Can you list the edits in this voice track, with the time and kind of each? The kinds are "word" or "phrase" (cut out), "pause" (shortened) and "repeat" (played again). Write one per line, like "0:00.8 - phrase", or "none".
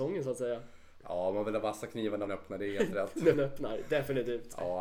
0:02.3 - word
0:03.3 - word